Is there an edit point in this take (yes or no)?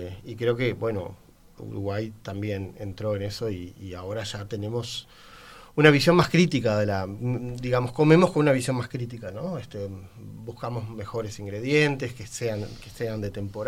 no